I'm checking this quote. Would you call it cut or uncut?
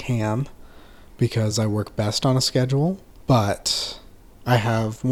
uncut